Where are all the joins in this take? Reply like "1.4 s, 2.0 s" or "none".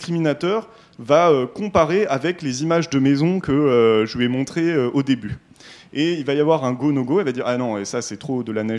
none